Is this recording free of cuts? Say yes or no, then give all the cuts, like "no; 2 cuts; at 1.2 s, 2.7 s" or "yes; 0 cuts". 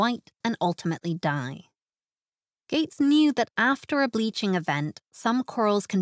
yes; 0 cuts